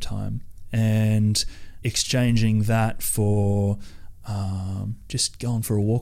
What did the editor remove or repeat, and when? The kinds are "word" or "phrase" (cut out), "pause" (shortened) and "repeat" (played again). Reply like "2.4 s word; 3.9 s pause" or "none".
1.8 s word